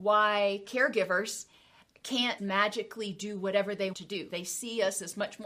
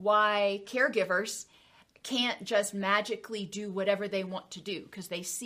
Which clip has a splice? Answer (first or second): first